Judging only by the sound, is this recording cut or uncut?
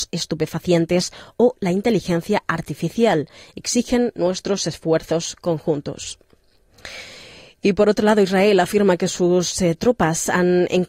uncut